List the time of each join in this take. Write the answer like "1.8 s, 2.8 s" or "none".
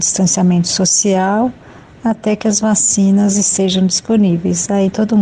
none